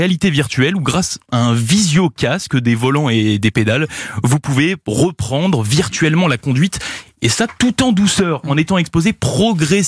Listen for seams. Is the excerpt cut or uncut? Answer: uncut